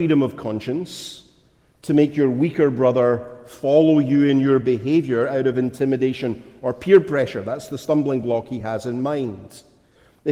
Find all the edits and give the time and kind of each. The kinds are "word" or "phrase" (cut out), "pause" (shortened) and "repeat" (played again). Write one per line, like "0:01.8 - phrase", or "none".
none